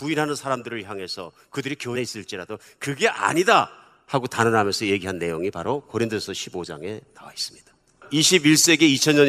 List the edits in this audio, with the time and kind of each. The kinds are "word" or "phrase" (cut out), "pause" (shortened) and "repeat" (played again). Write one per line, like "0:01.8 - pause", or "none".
0:01.9 - word